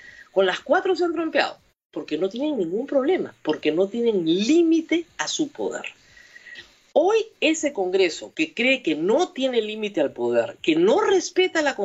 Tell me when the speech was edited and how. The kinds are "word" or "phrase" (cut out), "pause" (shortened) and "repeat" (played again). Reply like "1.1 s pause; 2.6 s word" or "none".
none